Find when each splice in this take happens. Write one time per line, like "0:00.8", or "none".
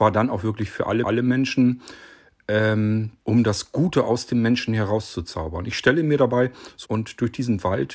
0:01.0
0:03.2
0:06.8